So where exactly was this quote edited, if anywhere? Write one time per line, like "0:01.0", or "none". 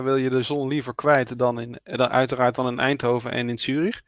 none